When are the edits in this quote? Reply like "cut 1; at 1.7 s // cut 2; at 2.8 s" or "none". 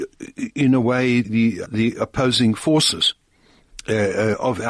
cut 1; at 1.2 s // cut 2; at 1.7 s